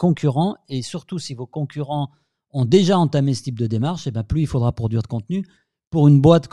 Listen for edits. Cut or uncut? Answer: uncut